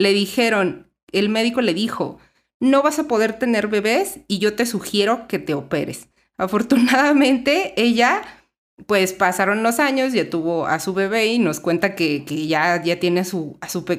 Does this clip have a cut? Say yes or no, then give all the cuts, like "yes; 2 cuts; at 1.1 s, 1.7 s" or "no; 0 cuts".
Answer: no; 0 cuts